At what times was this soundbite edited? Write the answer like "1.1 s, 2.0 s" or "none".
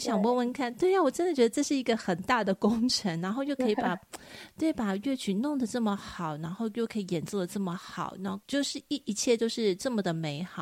8.4 s